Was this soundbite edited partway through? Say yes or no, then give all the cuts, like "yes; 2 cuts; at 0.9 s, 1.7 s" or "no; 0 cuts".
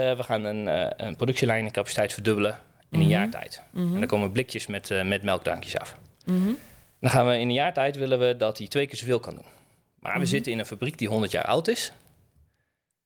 no; 0 cuts